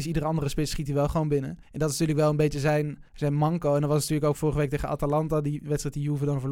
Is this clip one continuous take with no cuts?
no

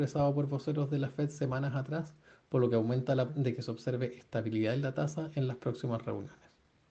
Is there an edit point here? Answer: yes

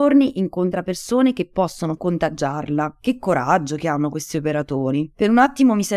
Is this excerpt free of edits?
no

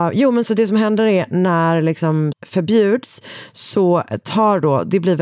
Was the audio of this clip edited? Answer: yes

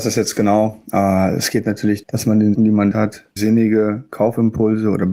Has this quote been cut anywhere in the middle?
yes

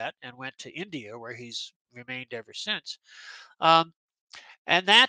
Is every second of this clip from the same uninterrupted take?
yes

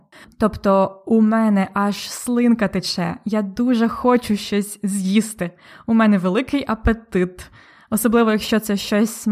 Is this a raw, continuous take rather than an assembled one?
yes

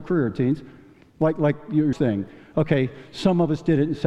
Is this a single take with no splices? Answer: no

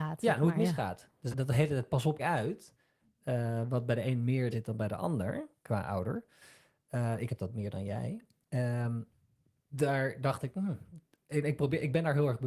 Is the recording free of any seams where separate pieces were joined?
no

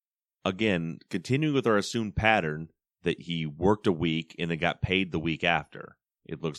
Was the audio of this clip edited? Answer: no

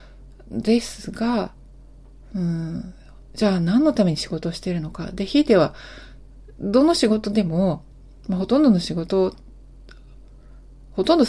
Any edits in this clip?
no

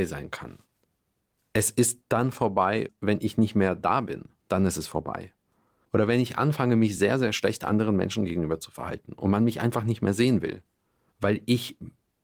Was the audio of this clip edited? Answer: no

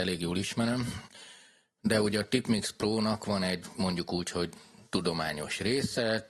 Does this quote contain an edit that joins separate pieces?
no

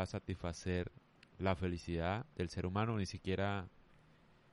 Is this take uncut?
no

